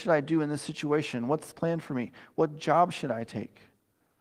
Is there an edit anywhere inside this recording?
yes; 1 cut; at 1.5 s

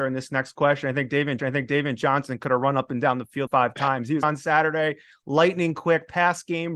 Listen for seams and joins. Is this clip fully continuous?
no; 3 cuts; at 1.4 s, 3.5 s, 4.2 s

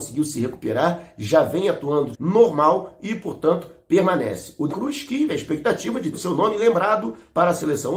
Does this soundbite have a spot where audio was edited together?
yes; 4 cuts; at 2.1 s, 4.7 s, 5.3 s, 6.1 s

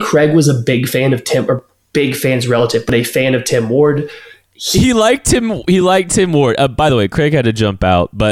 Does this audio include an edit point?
no; 0 cuts

